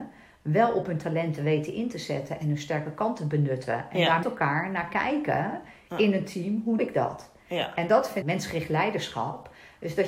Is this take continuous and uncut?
no; 3 cuts; at 4.2 s, 6.8 s, 8.2 s

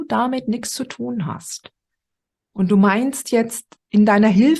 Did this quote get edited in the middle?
no; 0 cuts

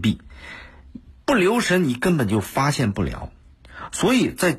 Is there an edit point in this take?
no; 0 cuts

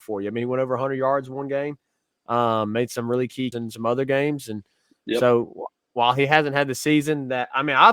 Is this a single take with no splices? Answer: no; 1 cut; at 3.5 s

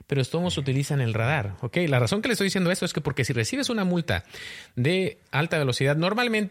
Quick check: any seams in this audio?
no; 0 cuts

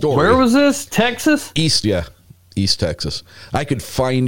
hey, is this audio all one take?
no; 1 cut; at 1.8 s

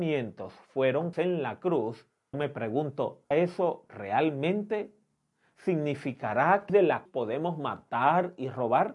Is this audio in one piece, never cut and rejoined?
no; 5 cuts; at 1.1 s, 2.3 s, 3.3 s, 6.7 s, 7.1 s

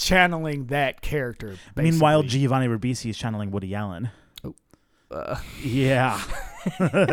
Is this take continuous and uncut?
yes; 0 cuts

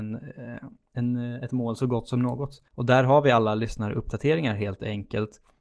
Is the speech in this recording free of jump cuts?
no; 1 cut; at 2.7 s

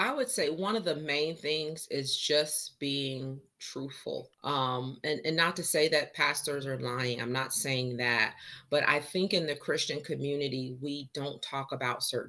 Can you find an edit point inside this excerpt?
yes; 1 cut; at 4.3 s

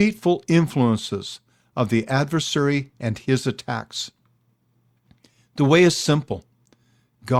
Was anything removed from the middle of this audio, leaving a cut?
no; 0 cuts

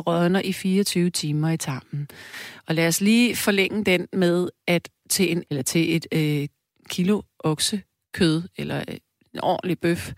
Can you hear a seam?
yes; 1 cut; at 5.4 s

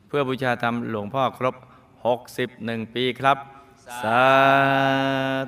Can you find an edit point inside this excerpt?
no; 0 cuts

